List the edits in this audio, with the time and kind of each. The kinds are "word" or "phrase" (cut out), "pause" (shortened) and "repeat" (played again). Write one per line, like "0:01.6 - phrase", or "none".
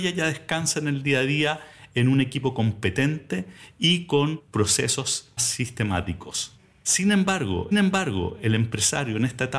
0:05.4 - word
0:07.7 - repeat